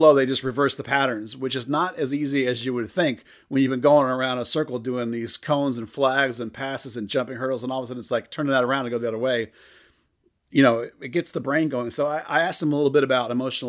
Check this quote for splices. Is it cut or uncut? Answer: uncut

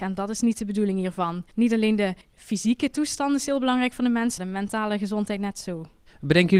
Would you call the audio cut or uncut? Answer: cut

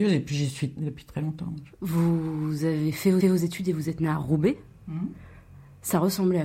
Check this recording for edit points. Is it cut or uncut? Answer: cut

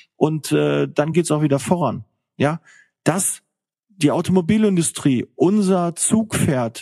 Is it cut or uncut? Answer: uncut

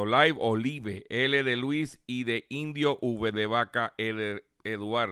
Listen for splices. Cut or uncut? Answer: uncut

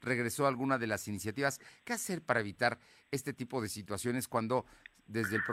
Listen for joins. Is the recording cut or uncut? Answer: uncut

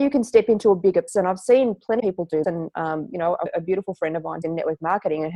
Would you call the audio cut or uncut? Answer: cut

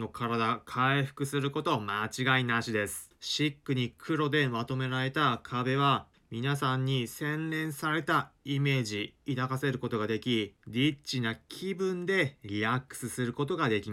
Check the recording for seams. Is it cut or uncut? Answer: uncut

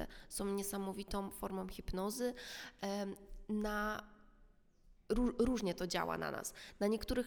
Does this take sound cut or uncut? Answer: uncut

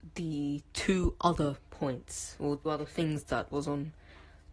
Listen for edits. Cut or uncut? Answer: cut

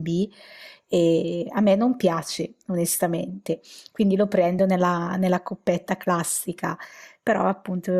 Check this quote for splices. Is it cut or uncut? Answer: uncut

